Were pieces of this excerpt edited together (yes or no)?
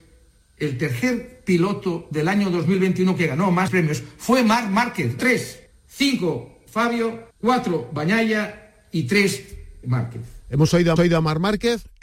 yes